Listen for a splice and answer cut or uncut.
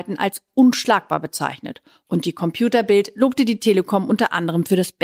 uncut